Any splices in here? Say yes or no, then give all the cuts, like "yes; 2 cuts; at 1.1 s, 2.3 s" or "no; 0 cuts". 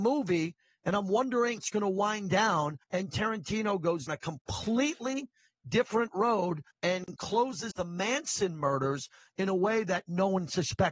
yes; 5 cuts; at 1.6 s, 2.8 s, 4.1 s, 6.7 s, 7.7 s